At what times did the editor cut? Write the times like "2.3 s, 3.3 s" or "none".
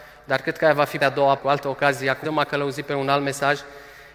1.0 s, 1.4 s, 2.2 s